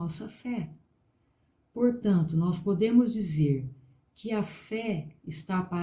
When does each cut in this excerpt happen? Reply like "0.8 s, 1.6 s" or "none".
none